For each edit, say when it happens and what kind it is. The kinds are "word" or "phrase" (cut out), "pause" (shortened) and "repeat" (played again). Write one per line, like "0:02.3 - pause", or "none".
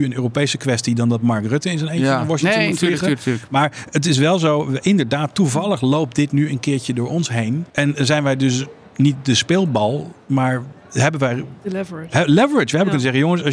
0:07.7 - pause